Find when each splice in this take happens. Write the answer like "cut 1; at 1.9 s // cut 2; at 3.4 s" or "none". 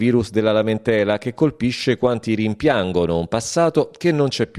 none